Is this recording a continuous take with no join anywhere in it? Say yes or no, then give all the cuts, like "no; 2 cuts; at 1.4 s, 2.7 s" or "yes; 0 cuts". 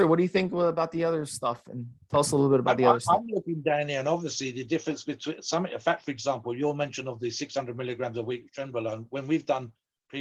yes; 0 cuts